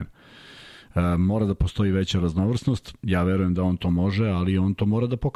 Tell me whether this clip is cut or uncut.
uncut